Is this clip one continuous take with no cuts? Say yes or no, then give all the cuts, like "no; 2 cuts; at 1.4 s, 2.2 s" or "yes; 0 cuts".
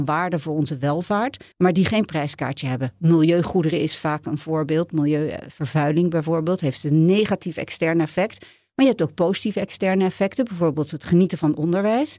no; 1 cut; at 1.5 s